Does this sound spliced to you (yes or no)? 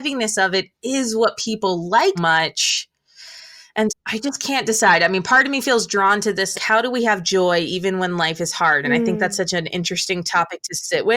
yes